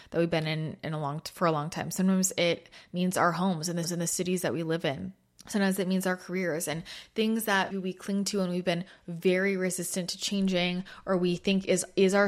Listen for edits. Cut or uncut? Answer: cut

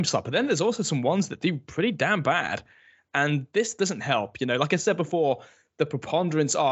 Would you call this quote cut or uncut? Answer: uncut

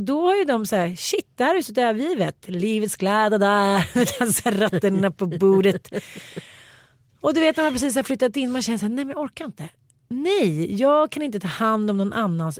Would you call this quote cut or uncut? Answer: uncut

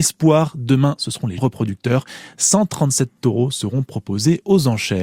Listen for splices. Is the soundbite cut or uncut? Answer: cut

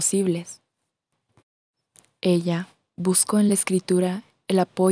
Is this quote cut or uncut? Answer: uncut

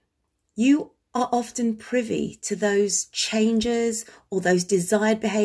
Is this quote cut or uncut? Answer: uncut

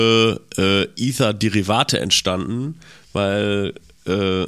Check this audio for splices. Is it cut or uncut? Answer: uncut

